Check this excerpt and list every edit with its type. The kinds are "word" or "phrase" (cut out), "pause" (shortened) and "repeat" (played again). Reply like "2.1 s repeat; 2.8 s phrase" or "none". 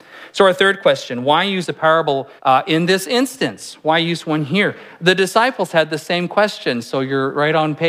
2.4 s pause